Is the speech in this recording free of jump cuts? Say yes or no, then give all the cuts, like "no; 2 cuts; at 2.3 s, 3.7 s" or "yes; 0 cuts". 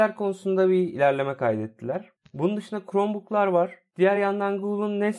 yes; 0 cuts